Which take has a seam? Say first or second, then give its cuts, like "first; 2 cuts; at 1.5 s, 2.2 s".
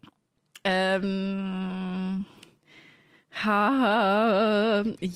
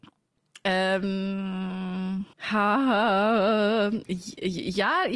second; 1 cut; at 2.3 s